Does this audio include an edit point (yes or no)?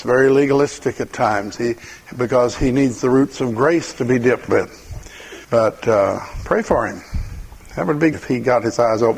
yes